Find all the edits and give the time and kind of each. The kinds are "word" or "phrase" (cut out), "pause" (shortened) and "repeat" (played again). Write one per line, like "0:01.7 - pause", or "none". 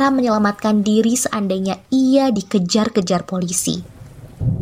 none